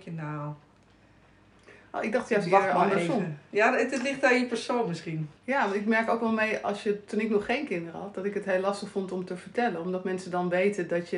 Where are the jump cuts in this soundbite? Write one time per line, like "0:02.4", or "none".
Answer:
0:05.4